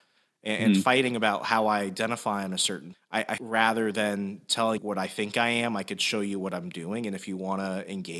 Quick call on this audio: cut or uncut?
cut